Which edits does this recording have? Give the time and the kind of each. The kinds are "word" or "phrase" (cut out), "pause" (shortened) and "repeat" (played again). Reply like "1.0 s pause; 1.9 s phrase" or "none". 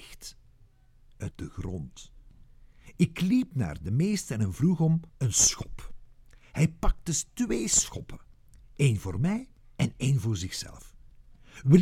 1.3 s phrase; 5.1 s pause; 9.6 s pause